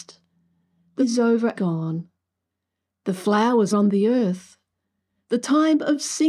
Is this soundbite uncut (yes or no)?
no